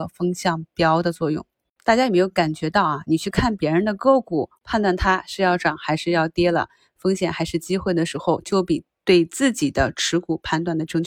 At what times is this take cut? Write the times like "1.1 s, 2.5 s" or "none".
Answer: 4.5 s